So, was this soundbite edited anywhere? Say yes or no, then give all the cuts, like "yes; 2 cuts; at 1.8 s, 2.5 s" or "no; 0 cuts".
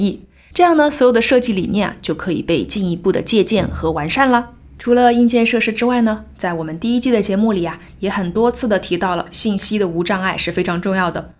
no; 0 cuts